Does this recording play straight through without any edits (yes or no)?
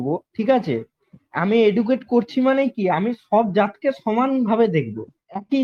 yes